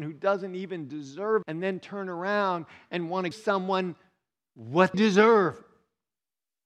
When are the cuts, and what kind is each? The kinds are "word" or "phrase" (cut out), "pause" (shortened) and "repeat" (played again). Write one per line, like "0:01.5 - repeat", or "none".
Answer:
0:01.4 - word
0:03.3 - word
0:04.9 - word